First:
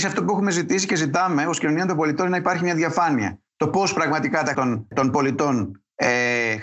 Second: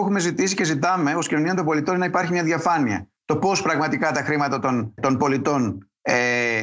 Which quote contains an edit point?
first; 1 cut; at 4.5 s

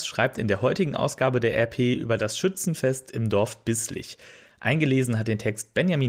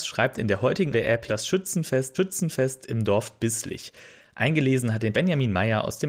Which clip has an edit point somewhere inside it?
second; 4 cuts; at 0.9 s, 1.3 s, 2.1 s, 5.1 s

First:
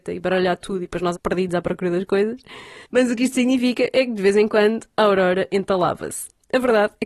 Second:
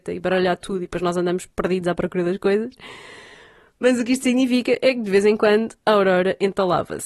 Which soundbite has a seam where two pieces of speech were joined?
first; 2 cuts; at 1.1 s, 2.8 s

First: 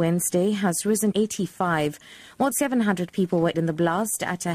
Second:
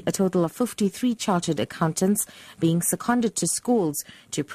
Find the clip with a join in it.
first; 3 cuts; at 1.1 s, 2.5 s, 3.5 s

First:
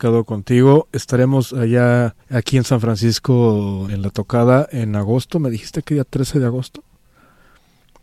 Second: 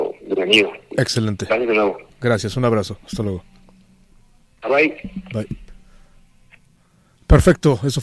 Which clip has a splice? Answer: first; 2 cuts; at 2.2 s, 3.9 s

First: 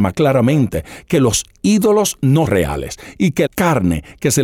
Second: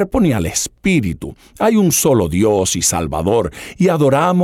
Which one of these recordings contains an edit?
first; 2 cuts; at 2.5 s, 3.5 s

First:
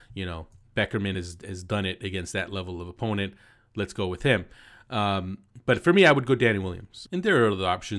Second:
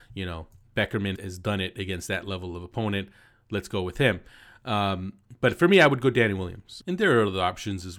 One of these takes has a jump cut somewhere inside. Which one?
second; 1 cut; at 1.1 s

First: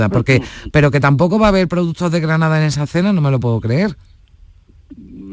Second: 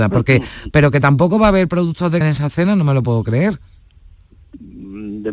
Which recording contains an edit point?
second; 1 cut; at 2.2 s

